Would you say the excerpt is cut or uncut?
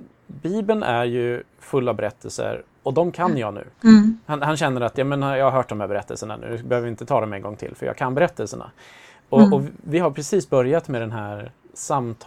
cut